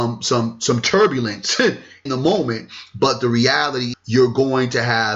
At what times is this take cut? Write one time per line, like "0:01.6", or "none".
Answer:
0:02.1
0:03.9